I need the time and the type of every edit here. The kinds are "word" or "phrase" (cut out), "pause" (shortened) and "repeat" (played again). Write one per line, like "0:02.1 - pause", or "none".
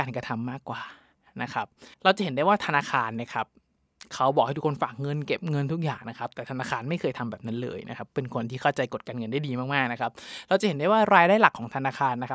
0:01.9 - pause

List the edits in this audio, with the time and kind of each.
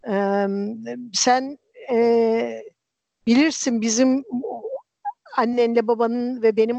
none

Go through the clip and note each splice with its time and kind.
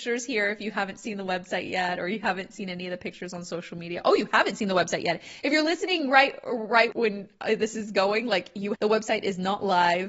0:06.9 - word
0:08.7 - word

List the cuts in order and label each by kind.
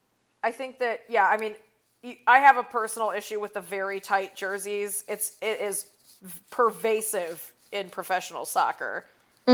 none

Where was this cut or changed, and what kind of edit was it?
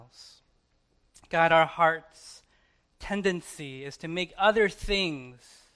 none

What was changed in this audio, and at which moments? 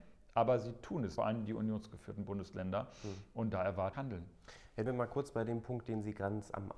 0:01.2 - phrase
0:03.9 - word
0:04.9 - phrase

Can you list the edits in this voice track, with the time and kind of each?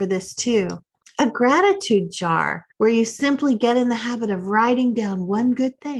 0:01.0 - pause
0:02.7 - pause

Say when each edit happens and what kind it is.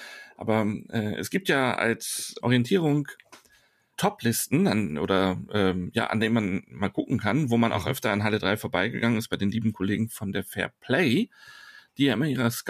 0:02.4 - word
0:03.9 - word

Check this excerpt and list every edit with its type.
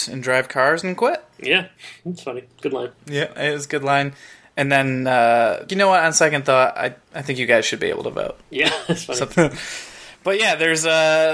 0:05.7 - phrase
0:07.0 - pause
0:08.4 - pause
0:09.3 - word

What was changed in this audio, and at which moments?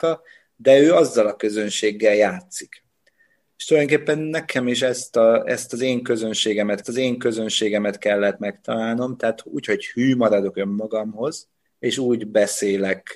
0:06.8 - repeat

